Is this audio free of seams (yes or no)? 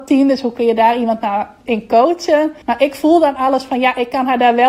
no